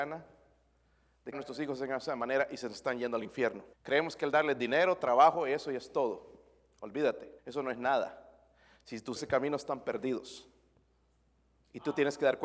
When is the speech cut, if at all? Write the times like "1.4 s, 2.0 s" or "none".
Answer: 1.3 s, 3.7 s, 7.4 s, 9.2 s